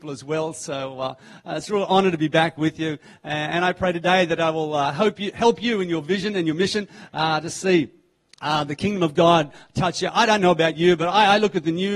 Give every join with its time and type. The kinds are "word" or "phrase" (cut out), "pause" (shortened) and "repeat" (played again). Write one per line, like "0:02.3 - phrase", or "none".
none